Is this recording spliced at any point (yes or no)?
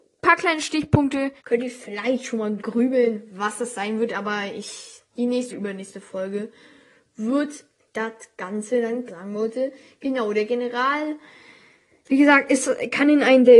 yes